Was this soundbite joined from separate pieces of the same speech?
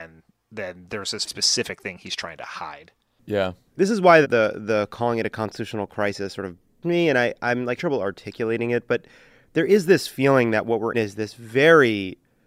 yes; 6 cuts; at 1.3 s, 3.7 s, 4.2 s, 6.8 s, 7.8 s, 10.9 s

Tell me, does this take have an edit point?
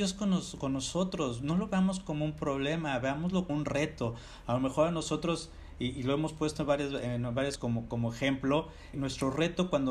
yes; 4 cuts; at 3.5 s, 7.6 s, 7.9 s, 8.9 s

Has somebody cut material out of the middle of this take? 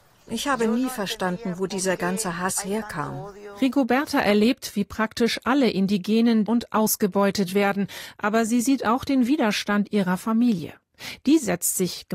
yes; 1 cut; at 6.4 s

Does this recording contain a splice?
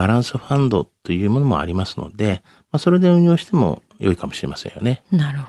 no; 0 cuts

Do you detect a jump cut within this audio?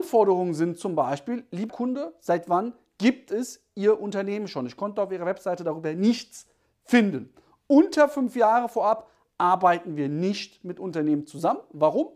yes; 1 cut; at 1.7 s

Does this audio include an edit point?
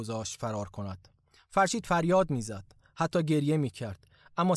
no; 0 cuts

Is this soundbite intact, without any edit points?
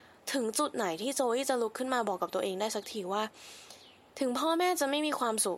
yes; 0 cuts

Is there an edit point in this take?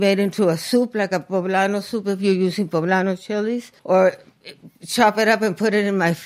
yes; 1 cut; at 3.8 s

